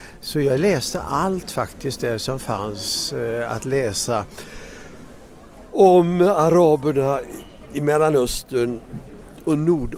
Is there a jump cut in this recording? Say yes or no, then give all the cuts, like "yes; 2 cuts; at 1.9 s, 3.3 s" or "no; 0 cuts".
no; 0 cuts